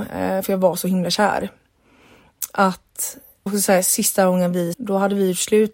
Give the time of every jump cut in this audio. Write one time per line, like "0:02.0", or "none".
0:03.5
0:04.7